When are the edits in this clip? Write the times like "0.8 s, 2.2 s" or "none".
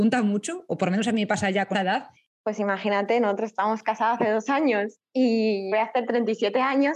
1.7 s, 2.2 s, 5.7 s